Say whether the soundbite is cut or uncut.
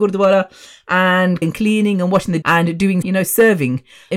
cut